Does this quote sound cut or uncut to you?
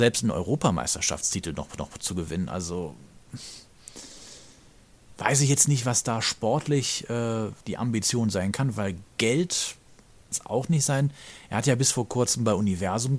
cut